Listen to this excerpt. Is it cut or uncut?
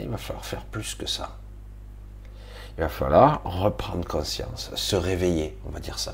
uncut